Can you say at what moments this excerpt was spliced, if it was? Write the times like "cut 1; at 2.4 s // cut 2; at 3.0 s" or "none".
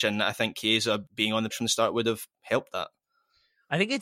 cut 1; at 1.1 s // cut 2; at 1.5 s